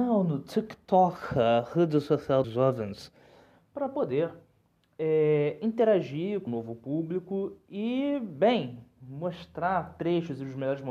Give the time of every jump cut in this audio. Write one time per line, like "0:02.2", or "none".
0:02.4
0:06.5